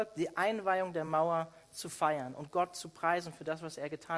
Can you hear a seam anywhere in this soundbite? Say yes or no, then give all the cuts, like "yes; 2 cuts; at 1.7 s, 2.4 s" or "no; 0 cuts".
no; 0 cuts